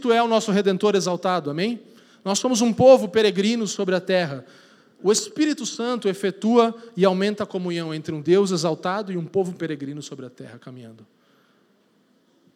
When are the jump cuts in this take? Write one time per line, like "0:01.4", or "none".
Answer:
none